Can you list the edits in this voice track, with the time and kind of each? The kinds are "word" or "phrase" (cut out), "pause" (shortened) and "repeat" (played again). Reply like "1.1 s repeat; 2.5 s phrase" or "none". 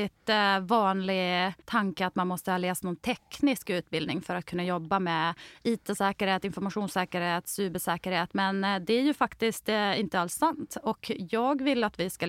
1.6 s pause